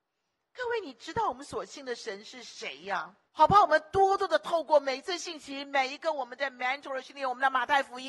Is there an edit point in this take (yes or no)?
yes